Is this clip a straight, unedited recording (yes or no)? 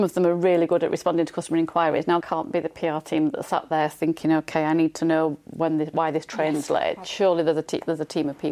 no